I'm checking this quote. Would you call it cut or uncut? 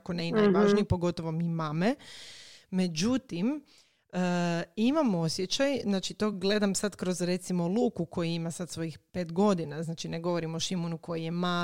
uncut